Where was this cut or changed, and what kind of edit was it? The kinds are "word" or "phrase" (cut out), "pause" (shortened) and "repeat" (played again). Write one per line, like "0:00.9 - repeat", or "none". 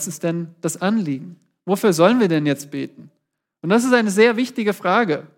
none